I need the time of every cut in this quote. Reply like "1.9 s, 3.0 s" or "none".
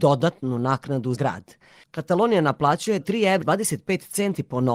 1.1 s, 3.0 s, 3.4 s